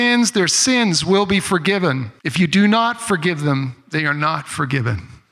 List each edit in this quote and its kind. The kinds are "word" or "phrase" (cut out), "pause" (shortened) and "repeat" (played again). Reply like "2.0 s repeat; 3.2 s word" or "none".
2.2 s pause